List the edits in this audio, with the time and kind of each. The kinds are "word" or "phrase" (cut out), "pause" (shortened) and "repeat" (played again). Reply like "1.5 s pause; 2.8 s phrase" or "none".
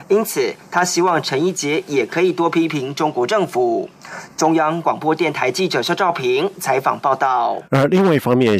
7.7 s pause